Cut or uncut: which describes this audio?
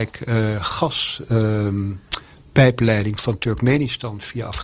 uncut